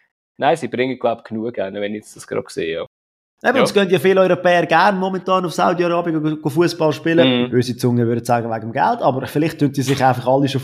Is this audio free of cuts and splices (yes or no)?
yes